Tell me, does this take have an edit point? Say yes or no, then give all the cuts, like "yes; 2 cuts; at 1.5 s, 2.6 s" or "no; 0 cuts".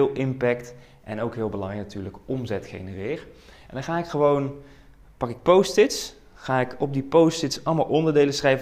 no; 0 cuts